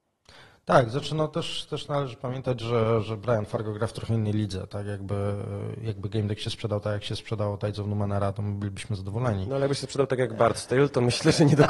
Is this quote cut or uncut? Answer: uncut